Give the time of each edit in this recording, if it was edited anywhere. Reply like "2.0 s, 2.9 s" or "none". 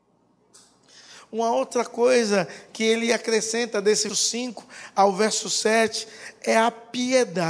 4.1 s